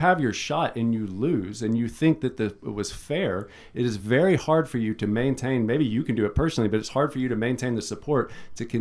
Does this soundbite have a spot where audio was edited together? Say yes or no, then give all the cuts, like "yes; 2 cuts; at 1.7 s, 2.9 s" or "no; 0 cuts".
no; 0 cuts